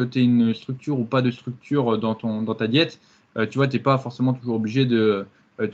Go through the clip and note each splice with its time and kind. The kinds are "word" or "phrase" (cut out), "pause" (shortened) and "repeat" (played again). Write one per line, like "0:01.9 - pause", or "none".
none